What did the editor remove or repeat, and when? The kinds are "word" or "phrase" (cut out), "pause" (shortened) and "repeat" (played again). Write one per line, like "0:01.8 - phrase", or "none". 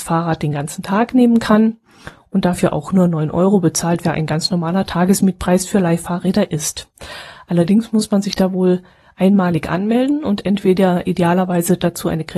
0:04.0 - word